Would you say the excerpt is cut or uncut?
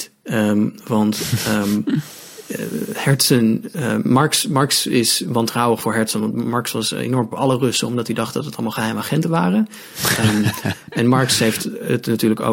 cut